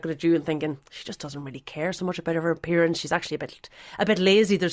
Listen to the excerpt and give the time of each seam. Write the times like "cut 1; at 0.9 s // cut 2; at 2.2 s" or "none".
none